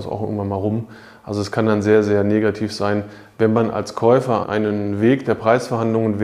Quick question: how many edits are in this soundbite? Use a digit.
1